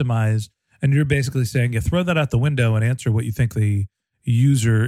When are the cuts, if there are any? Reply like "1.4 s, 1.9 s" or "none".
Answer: none